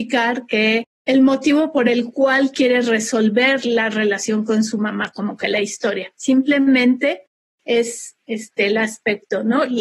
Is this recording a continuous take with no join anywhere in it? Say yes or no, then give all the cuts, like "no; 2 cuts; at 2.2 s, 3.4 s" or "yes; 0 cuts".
yes; 0 cuts